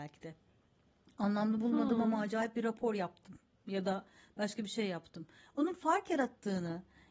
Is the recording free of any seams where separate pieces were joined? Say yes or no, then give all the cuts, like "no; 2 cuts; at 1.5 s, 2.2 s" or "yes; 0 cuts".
yes; 0 cuts